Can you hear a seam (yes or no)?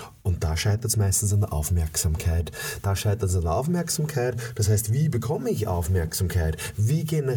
no